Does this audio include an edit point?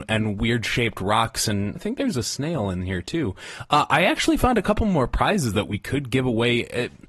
yes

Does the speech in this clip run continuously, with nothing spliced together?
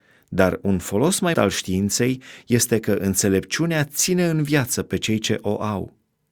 no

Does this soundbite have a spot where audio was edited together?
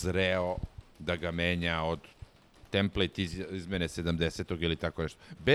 no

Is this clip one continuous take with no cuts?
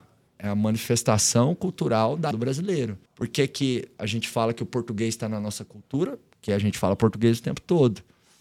no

